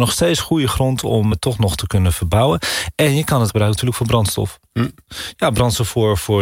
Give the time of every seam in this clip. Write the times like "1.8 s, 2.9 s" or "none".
1.3 s, 3.5 s

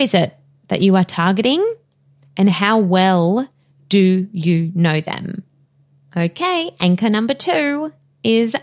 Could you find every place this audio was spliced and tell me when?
none

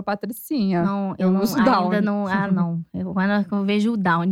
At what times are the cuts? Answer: none

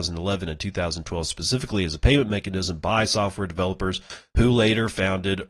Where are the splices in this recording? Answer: none

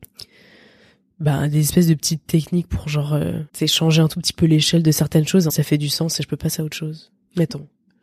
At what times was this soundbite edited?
3.5 s, 5.5 s

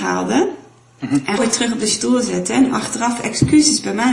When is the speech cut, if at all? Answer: 1.4 s

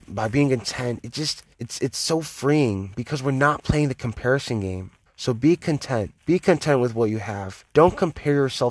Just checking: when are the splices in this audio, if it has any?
1.5 s, 5.1 s, 6.2 s, 7.7 s

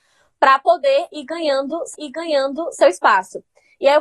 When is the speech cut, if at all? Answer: 1.9 s

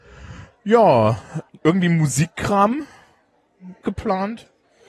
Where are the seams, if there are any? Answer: 1.5 s, 3.8 s

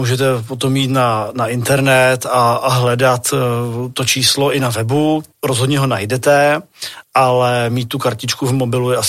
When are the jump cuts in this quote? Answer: 5.3 s, 7.0 s

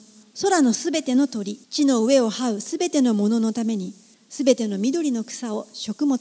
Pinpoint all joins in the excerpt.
1.6 s

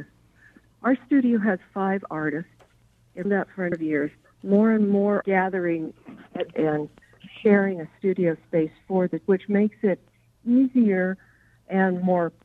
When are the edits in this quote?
3.2 s, 3.7 s, 5.2 s, 6.5 s, 9.3 s

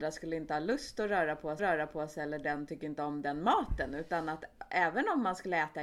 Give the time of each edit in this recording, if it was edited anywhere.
1.6 s

